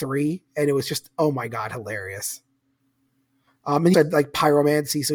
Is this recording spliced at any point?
yes; 1 cut; at 3.9 s

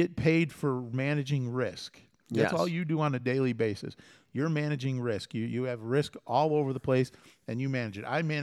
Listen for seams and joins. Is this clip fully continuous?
yes; 0 cuts

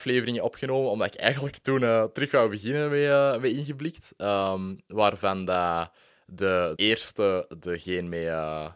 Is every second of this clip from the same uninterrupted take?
no; 1 cut; at 6.8 s

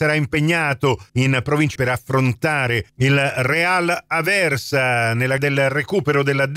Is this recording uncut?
no; 3 cuts; at 1.1 s, 1.8 s, 5.4 s

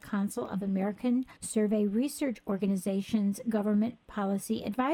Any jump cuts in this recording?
yes; 1 cut; at 1.4 s

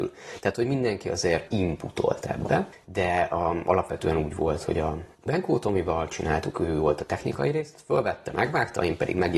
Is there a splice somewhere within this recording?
no; 0 cuts

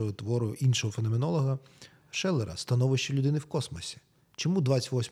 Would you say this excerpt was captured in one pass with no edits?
yes; 0 cuts

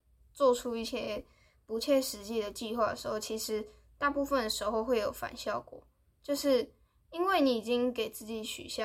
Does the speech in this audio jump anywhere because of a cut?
no; 0 cuts

